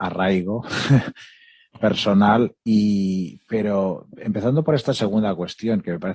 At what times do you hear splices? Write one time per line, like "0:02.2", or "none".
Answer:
none

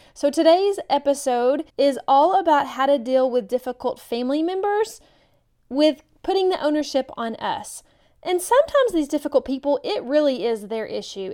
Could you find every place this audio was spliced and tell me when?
0:01.7

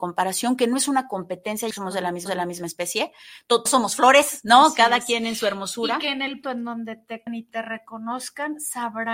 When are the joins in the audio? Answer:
0:01.7
0:02.3
0:03.7
0:06.4
0:07.3

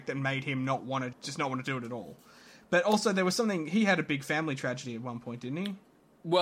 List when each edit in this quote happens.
0:01.1

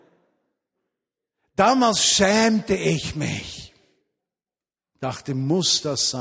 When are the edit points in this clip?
none

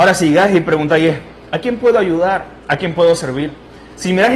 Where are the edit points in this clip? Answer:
none

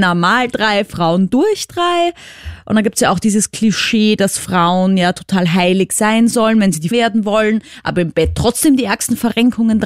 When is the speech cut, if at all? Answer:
0:06.9

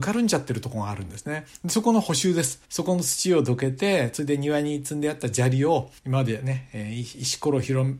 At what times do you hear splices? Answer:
0:02.6
0:06.0

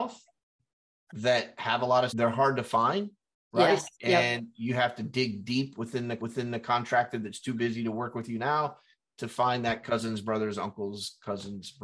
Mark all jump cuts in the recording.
0:02.1
0:03.9
0:06.2

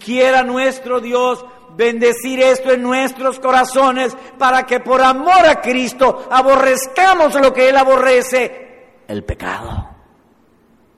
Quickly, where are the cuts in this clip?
none

